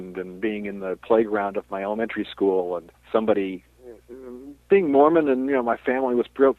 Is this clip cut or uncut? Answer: cut